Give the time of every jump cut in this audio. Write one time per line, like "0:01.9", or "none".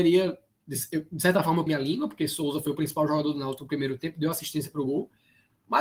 0:01.7